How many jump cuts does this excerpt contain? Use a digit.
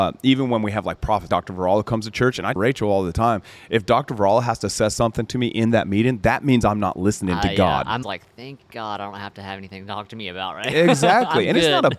3